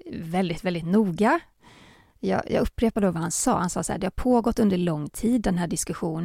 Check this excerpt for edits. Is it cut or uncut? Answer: uncut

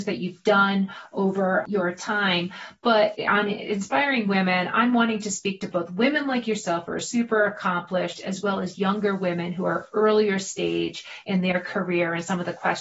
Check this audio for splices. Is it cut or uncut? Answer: uncut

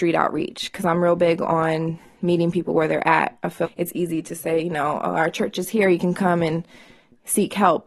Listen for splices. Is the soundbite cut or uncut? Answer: cut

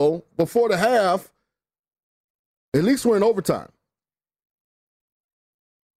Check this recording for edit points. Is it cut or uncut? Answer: uncut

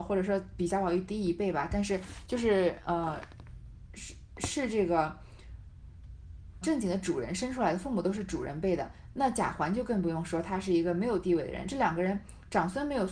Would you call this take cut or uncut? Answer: cut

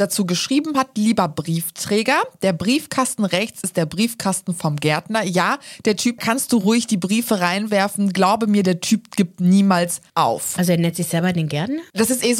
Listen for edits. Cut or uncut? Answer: cut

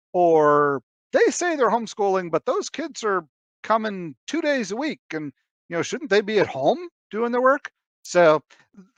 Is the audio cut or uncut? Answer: uncut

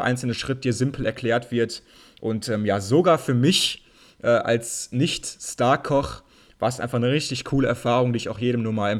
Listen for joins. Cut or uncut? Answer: uncut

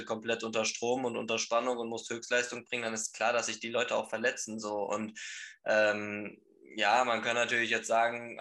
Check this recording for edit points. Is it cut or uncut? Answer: uncut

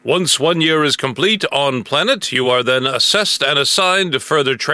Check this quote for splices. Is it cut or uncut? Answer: uncut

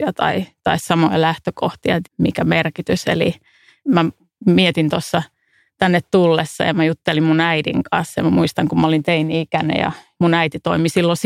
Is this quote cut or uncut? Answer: cut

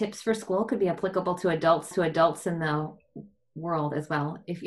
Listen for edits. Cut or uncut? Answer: cut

